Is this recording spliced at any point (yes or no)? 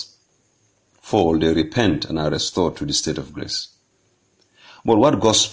no